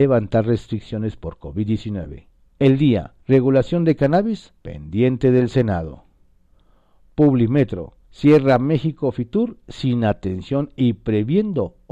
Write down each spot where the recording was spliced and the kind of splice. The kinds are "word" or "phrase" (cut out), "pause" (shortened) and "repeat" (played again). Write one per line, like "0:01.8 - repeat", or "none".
0:02.4 - pause
0:03.2 - pause
0:04.6 - pause
0:08.0 - pause